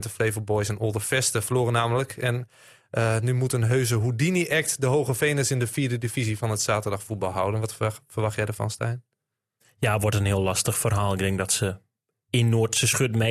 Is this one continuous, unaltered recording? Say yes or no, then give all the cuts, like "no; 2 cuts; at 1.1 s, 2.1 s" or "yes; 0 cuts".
yes; 0 cuts